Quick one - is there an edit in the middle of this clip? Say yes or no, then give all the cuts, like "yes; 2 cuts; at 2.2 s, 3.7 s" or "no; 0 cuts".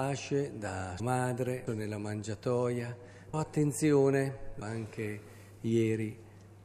yes; 4 cuts; at 1.0 s, 1.7 s, 3.3 s, 4.6 s